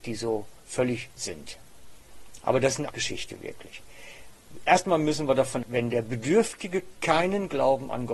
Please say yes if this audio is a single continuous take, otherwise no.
no